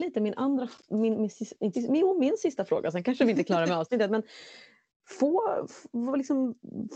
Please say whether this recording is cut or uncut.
cut